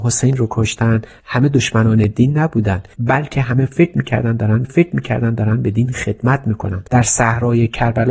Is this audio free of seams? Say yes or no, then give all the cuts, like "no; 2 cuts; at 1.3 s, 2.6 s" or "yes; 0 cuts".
no; 3 cuts; at 2.9 s, 4.6 s, 6.9 s